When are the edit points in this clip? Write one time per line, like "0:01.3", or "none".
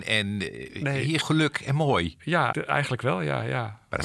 0:01.2
0:02.5